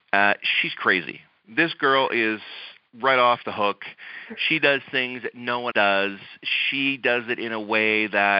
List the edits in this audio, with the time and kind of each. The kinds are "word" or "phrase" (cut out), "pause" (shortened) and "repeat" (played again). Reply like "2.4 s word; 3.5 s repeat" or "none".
5.7 s word